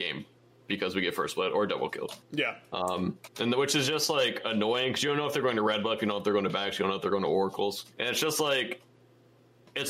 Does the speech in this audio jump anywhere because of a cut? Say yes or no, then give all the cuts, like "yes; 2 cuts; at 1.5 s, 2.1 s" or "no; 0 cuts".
yes; 2 cuts; at 3.3 s, 7.9 s